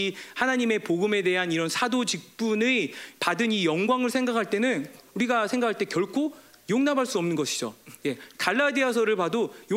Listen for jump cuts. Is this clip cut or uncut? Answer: uncut